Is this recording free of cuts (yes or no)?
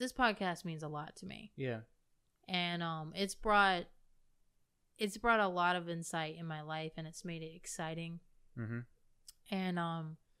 yes